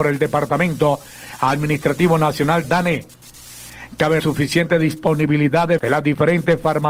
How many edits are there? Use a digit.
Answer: 3